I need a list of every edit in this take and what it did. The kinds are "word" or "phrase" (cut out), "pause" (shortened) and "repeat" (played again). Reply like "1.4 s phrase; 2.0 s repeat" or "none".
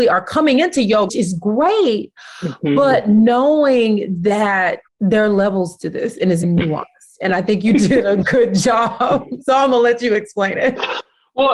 1.1 s word; 4.9 s pause; 6.4 s word